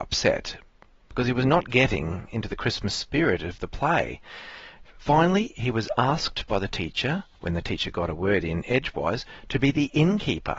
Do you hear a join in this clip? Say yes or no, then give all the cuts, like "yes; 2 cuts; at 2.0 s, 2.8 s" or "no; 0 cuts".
yes; 1 cut; at 7.3 s